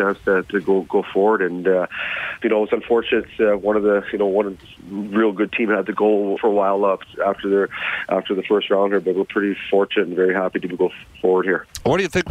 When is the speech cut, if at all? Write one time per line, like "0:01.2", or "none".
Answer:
0:02.4
0:06.0
0:06.4
0:10.7